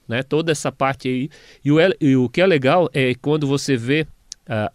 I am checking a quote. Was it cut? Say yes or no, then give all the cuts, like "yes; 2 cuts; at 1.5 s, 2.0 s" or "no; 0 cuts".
no; 0 cuts